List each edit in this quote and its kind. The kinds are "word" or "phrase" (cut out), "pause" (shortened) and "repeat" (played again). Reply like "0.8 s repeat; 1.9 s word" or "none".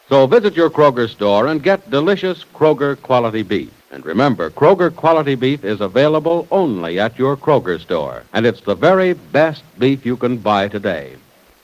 3.8 s pause; 8.3 s pause